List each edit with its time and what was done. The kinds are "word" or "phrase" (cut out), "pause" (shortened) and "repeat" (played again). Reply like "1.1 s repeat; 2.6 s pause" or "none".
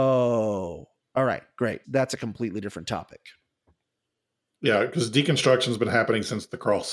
1.0 s word; 1.8 s word